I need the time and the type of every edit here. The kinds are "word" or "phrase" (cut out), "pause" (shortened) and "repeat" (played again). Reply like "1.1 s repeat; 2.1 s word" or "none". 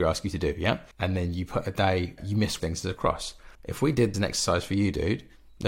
0.9 s pause; 2.2 s word; 2.6 s phrase; 3.5 s pause; 4.1 s phrase